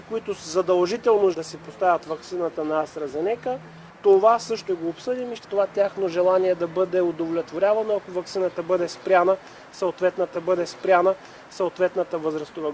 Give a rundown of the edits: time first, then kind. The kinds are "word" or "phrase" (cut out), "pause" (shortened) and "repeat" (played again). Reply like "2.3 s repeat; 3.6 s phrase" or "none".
1.3 s word; 4.7 s word; 5.4 s phrase; 10.3 s repeat